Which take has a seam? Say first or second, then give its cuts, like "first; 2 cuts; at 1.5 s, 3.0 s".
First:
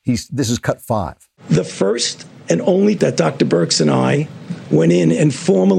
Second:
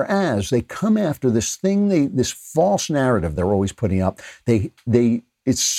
first; 2 cuts; at 1.4 s, 3.0 s